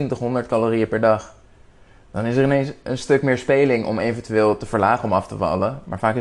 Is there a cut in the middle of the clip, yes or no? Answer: no